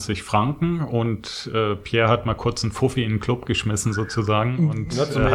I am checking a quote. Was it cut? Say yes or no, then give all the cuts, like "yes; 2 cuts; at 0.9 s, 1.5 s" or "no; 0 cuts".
no; 0 cuts